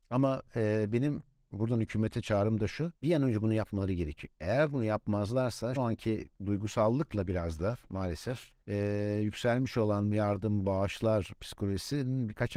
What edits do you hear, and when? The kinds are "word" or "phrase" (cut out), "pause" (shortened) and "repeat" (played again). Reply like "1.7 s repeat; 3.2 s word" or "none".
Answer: 3.0 s pause; 5.8 s word; 8.6 s pause